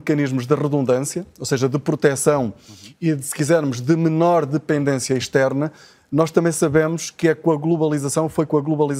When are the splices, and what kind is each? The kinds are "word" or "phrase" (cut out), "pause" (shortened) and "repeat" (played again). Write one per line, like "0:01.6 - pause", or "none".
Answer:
none